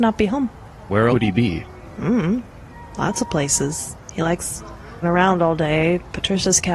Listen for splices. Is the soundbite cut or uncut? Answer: cut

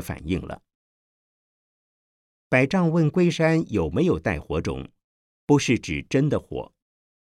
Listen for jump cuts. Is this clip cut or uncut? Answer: uncut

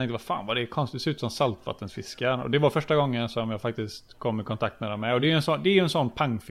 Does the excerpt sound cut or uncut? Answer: uncut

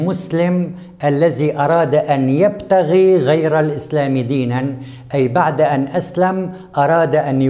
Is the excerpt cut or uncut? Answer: uncut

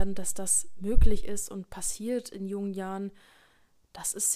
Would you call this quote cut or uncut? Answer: uncut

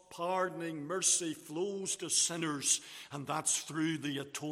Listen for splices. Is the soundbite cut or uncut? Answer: uncut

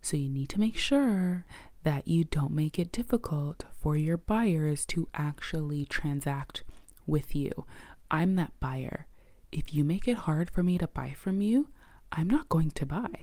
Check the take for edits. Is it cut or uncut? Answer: uncut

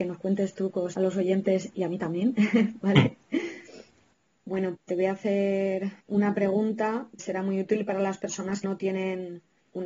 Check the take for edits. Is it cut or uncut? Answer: cut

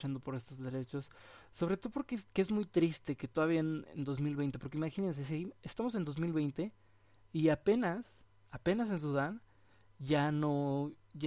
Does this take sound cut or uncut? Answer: uncut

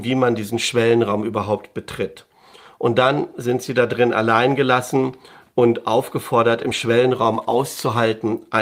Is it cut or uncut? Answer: uncut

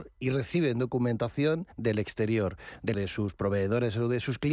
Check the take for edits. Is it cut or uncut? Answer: cut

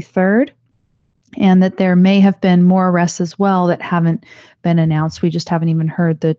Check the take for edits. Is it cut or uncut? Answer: uncut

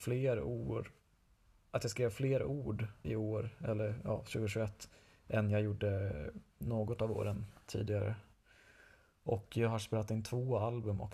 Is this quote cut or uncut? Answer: cut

